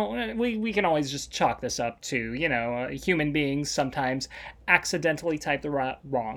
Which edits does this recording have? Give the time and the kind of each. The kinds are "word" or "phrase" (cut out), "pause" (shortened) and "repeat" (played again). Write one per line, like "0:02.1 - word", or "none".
none

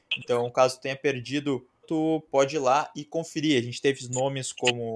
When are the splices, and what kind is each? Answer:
0:01.8 - word

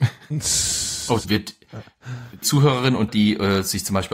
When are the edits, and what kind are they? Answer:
0:01.2 - word
0:02.4 - word
0:03.1 - word

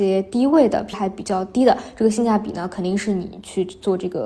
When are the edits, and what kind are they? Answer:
0:00.9 - word

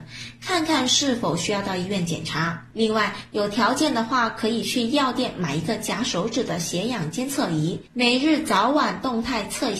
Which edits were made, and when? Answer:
0:02.7 - pause

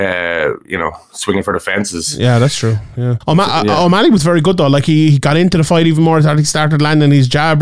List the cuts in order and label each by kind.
0:03.2 - pause

